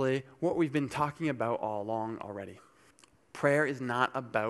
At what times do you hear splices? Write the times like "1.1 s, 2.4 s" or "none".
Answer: 2.9 s